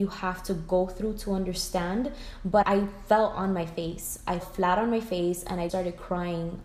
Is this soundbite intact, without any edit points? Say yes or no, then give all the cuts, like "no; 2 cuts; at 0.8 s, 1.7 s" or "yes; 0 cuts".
no; 3 cuts; at 2.6 s, 4.4 s, 5.7 s